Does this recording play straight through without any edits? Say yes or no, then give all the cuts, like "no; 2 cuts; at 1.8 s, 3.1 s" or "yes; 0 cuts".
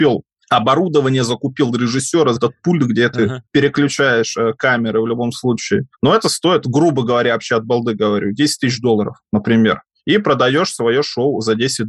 no; 2 cuts; at 2.4 s, 3.5 s